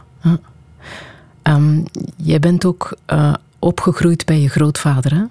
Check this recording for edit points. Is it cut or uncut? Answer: uncut